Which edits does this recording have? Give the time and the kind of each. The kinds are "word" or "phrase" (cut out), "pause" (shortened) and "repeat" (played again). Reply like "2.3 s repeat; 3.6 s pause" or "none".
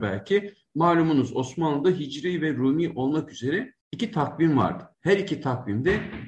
3.8 s pause; 4.9 s pause